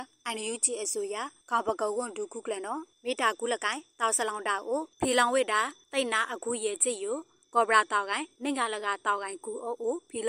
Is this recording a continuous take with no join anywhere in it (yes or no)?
yes